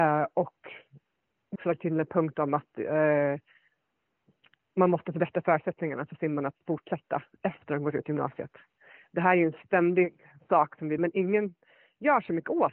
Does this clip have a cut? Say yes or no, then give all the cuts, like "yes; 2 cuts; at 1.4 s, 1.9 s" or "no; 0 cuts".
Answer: yes; 2 cuts; at 1.6 s, 11.0 s